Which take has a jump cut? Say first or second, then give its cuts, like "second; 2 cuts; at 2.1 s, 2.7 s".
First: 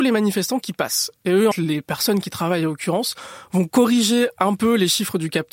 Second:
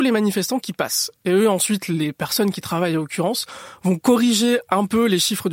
first; 1 cut; at 1.5 s